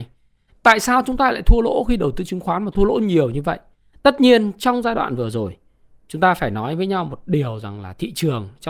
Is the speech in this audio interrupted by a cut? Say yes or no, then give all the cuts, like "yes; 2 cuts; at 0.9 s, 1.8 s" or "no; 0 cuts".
no; 0 cuts